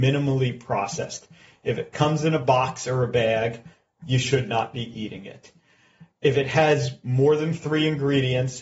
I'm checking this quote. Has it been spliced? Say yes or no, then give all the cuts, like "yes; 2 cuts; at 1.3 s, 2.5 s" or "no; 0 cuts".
no; 0 cuts